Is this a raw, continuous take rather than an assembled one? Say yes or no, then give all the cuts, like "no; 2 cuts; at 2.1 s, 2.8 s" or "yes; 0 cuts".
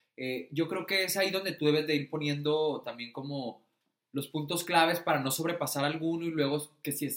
yes; 0 cuts